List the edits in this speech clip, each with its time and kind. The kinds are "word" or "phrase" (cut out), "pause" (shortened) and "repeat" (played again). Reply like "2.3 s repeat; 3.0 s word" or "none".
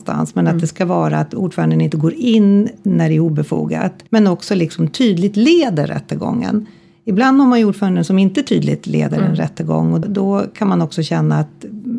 4.1 s pause; 10.0 s word